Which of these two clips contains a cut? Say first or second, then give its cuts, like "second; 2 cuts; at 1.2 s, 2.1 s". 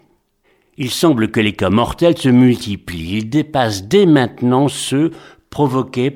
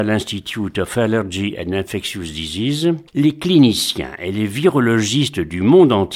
second; 1 cut; at 3.1 s